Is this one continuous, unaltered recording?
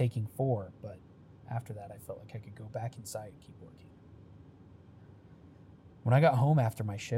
yes; 0 cuts

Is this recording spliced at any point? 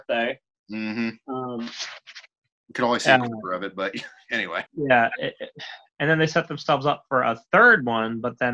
yes; 1 cut; at 4.7 s

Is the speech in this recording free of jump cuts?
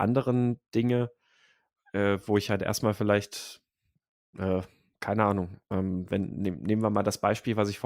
yes; 0 cuts

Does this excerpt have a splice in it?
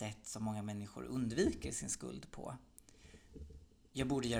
no; 0 cuts

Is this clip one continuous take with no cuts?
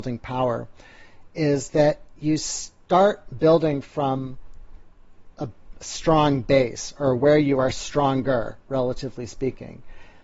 yes; 0 cuts

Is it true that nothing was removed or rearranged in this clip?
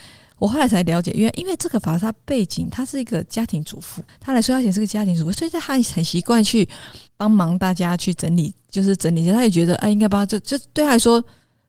no; 2 cuts; at 4.1 s, 7.1 s

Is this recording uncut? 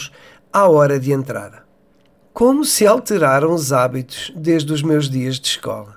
yes; 0 cuts

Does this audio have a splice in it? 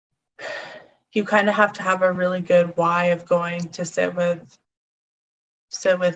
no; 0 cuts

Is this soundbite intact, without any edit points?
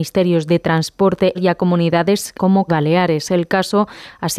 no; 3 cuts; at 1.3 s, 2.4 s, 2.7 s

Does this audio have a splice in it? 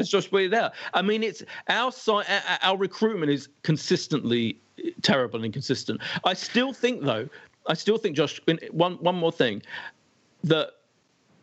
no; 0 cuts

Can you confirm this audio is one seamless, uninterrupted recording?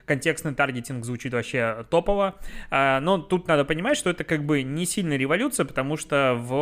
yes; 0 cuts

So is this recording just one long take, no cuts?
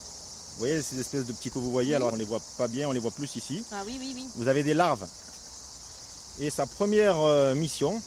no; 2 cuts; at 1.5 s, 2.1 s

